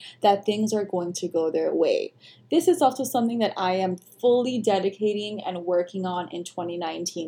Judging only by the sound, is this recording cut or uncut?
uncut